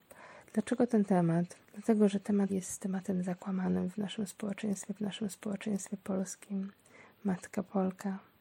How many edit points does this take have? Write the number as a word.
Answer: two